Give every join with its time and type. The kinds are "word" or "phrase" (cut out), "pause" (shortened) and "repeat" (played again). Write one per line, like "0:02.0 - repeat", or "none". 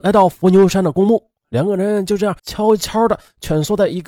0:01.4 - pause
0:02.4 - pause